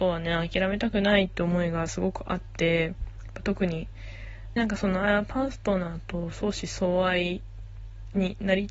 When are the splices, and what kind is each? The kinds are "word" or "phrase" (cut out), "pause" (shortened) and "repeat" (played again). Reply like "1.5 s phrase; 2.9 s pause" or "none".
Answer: 4.6 s word